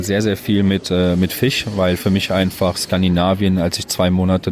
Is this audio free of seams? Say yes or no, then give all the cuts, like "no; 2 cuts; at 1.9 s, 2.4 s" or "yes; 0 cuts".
yes; 0 cuts